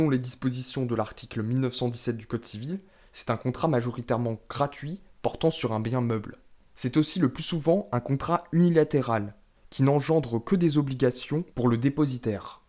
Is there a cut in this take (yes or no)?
no